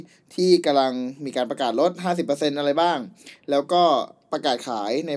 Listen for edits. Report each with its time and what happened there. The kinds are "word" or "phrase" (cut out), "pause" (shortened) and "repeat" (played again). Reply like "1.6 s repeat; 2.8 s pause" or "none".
none